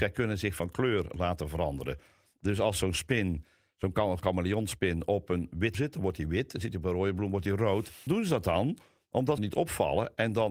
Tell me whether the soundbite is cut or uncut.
cut